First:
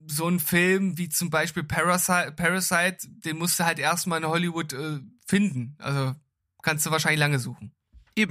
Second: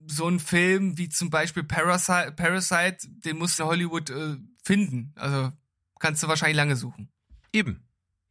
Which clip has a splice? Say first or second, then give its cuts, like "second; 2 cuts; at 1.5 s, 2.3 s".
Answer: second; 1 cut; at 3.6 s